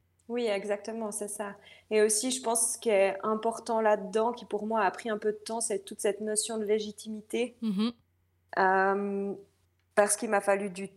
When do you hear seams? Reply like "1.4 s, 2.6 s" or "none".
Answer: none